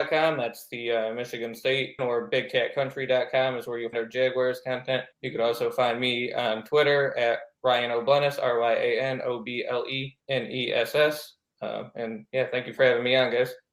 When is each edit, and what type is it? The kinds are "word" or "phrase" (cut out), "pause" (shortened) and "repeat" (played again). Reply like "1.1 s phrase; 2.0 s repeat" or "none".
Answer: 2.0 s phrase; 3.9 s word; 5.1 s pause; 7.5 s pause; 10.2 s pause